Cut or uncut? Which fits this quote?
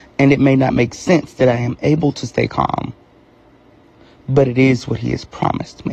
uncut